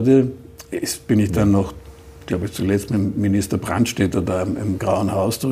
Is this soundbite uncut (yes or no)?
yes